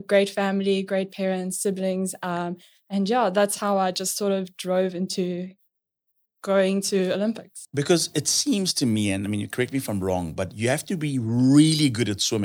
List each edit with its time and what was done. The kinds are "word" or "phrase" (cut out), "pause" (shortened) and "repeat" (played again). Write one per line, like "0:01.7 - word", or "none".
none